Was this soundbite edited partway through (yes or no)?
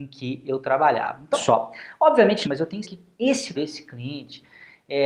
yes